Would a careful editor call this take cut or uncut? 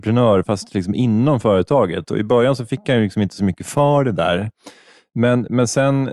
uncut